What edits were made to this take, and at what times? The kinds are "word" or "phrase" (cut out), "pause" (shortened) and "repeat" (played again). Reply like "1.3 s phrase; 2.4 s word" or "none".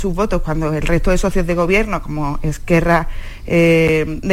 none